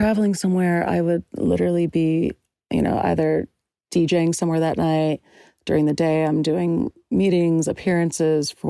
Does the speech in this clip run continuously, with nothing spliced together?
yes; 0 cuts

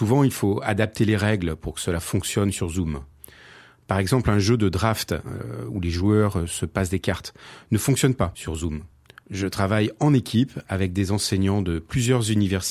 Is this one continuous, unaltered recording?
yes; 0 cuts

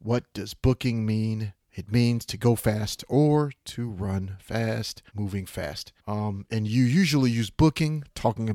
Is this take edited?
yes; 3 cuts; at 1.6 s, 5.1 s, 6.0 s

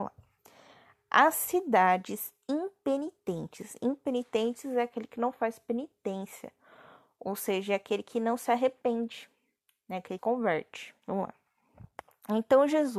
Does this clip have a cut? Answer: yes; 2 cuts; at 10.2 s, 11.0 s

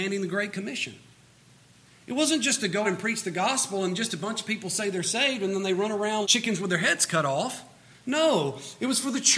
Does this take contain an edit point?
yes; 2 cuts; at 2.8 s, 6.2 s

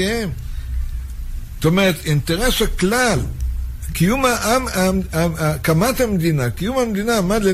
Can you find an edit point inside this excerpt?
no; 0 cuts

